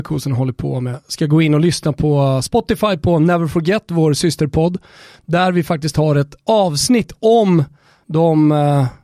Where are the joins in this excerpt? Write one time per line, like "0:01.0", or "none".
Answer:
none

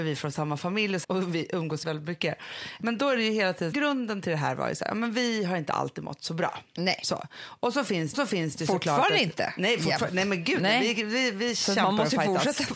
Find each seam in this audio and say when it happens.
0:01.0
0:01.8
0:03.7
0:08.1

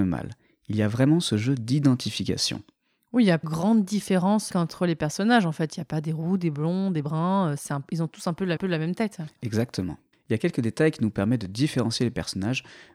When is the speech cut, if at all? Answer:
0:03.4
0:04.5
0:08.6
0:10.1

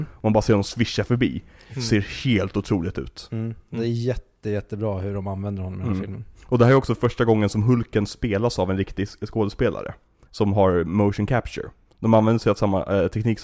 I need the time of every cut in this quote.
none

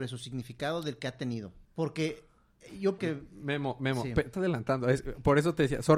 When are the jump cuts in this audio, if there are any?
0:01.6
0:03.0
0:04.3

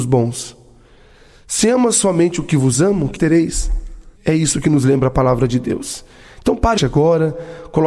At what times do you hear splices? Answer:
0:03.2
0:04.2
0:06.8

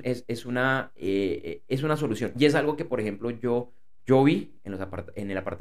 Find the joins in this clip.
none

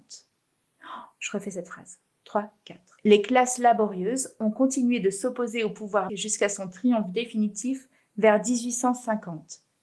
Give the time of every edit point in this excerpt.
0:03.0
0:06.1

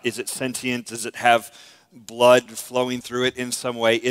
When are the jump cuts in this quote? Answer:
none

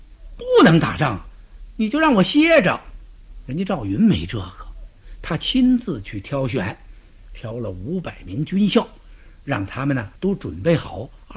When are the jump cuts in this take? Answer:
0:10.2

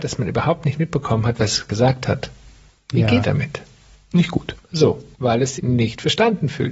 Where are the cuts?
0:01.7
0:03.2
0:05.1
0:05.6

